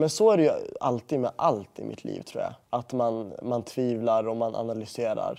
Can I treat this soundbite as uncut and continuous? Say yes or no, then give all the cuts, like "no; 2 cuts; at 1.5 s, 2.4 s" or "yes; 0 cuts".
no; 1 cut; at 2.6 s